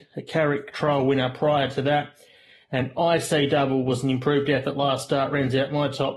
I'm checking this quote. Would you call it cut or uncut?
uncut